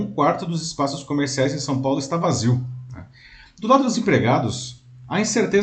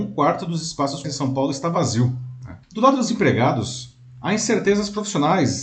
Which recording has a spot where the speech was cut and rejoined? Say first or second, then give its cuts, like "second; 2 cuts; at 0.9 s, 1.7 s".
second; 2 cuts; at 1.0 s, 2.6 s